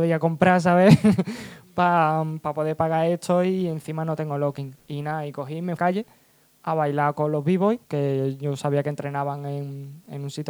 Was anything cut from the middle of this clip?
yes; 2 cuts; at 5.8 s, 7.8 s

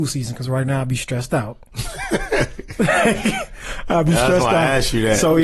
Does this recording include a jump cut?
no; 0 cuts

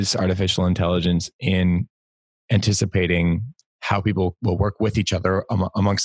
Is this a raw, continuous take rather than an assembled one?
yes; 0 cuts

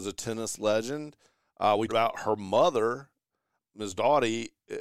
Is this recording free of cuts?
no; 2 cuts; at 1.9 s, 3.6 s

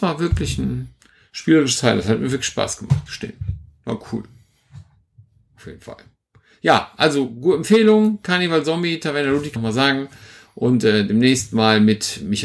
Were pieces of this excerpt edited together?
yes; 2 cuts; at 3.1 s, 9.6 s

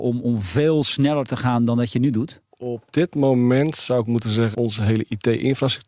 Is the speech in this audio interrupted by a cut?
yes; 2 cuts; at 2.5 s, 4.5 s

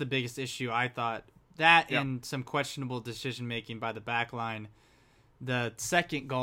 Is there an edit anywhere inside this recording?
no; 0 cuts

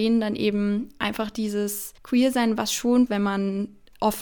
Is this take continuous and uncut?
no; 2 cuts; at 2.0 s, 3.1 s

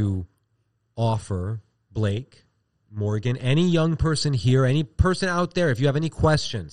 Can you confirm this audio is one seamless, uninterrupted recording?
yes; 0 cuts

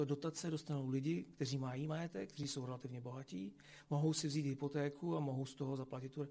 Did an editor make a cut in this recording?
no; 0 cuts

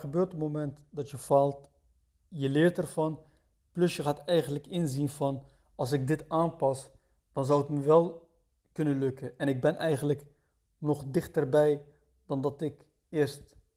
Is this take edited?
no; 0 cuts

